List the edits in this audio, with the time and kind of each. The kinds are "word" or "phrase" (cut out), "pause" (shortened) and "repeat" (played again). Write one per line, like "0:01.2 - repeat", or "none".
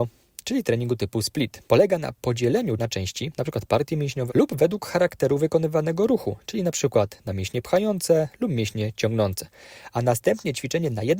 0:01.7 - pause
0:02.8 - word
0:04.3 - word